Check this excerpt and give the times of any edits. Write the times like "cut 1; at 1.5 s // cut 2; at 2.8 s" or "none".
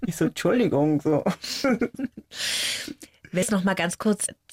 cut 1; at 3.4 s